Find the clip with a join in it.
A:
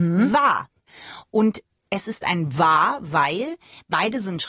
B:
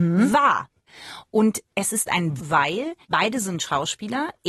B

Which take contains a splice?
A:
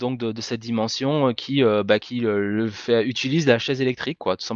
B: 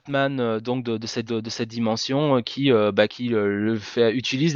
B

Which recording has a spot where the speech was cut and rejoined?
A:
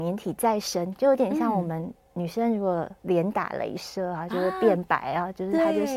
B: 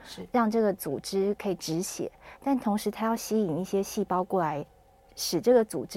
A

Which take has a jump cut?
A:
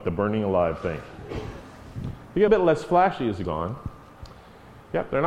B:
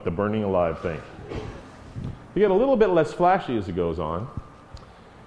A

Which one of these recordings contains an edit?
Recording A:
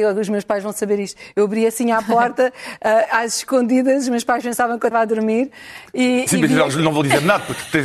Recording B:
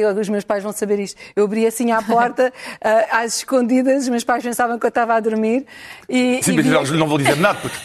A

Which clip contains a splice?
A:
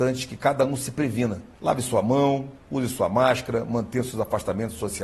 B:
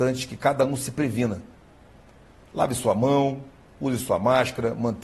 A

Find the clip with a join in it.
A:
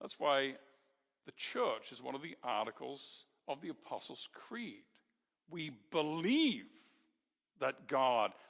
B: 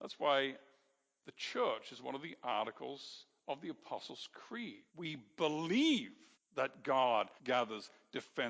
B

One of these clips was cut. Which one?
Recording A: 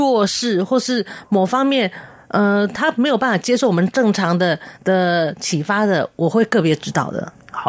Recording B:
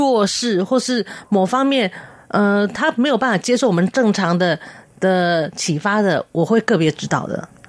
A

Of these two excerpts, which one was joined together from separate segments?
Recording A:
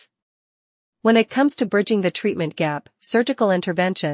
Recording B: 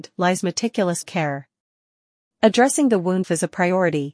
B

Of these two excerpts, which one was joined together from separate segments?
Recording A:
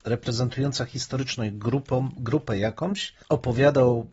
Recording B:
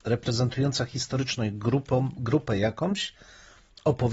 A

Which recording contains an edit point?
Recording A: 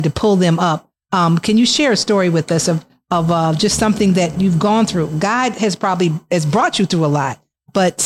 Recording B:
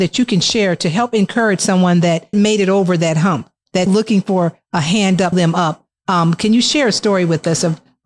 B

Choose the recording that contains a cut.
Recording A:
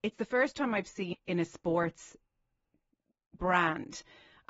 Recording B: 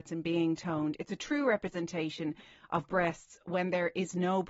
A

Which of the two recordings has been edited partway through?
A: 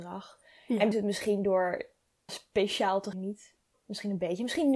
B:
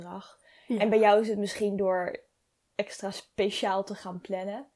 A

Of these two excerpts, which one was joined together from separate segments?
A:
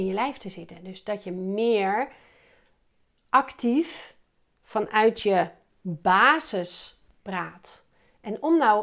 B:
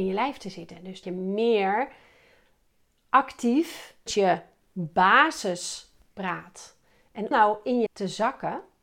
B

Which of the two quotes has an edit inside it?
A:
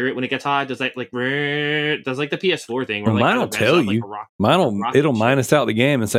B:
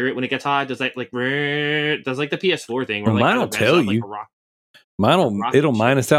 A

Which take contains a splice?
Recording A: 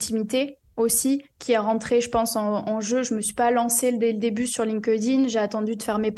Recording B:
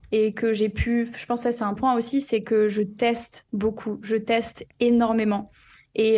B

